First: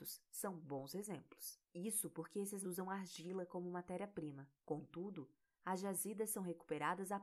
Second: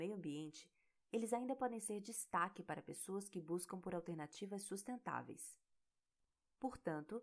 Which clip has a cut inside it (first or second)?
first